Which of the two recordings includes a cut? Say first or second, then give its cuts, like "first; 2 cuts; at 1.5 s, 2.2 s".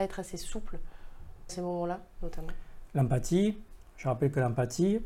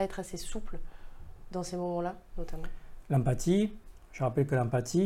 first; 1 cut; at 1.5 s